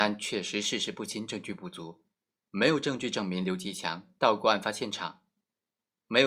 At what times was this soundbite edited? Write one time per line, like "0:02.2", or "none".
none